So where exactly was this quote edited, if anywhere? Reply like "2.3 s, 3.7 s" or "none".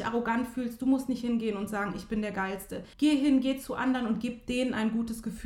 2.9 s